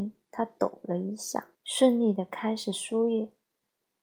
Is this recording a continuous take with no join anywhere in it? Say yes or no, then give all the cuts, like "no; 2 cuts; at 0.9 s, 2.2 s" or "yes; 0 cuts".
no; 1 cut; at 1.5 s